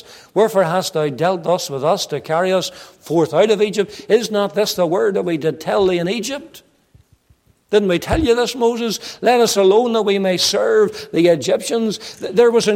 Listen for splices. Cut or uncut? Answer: uncut